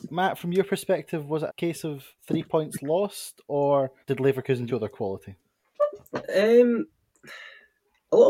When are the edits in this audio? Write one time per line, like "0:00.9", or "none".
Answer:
0:01.5
0:02.2
0:04.0
0:04.7